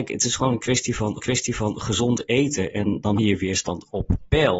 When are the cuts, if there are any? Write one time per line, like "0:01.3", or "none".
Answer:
0:01.2
0:03.2